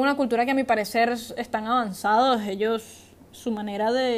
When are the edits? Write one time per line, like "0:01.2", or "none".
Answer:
none